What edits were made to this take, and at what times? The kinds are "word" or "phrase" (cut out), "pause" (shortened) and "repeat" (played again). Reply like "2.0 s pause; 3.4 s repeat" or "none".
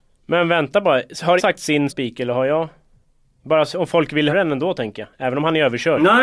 1.4 s word; 1.9 s word; 4.3 s word